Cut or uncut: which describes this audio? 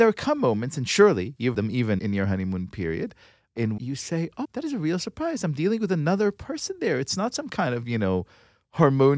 cut